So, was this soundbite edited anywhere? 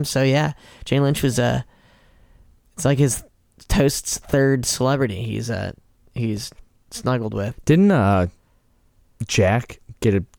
no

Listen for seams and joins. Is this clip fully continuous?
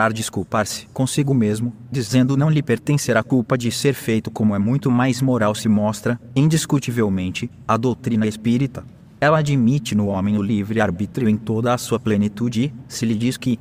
yes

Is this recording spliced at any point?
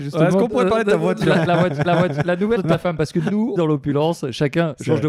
yes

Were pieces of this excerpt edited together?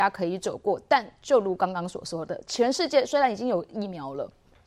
no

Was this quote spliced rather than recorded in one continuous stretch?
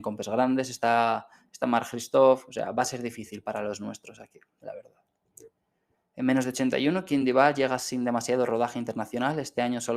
no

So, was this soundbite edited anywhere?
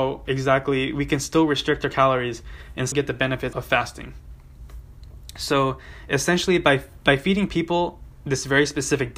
yes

